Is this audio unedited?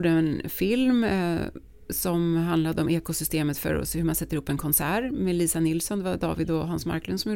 yes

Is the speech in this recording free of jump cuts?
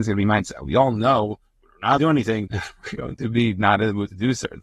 no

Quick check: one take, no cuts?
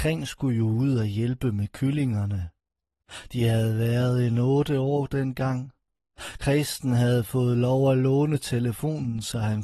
yes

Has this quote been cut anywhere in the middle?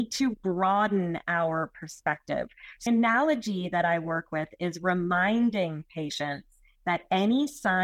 yes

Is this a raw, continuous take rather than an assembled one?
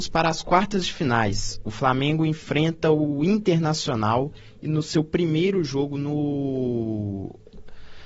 yes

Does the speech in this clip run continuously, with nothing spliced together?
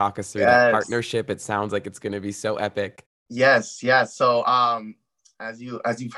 yes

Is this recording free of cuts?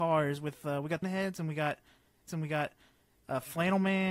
no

